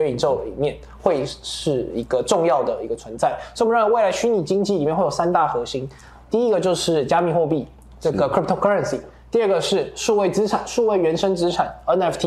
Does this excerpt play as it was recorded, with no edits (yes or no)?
yes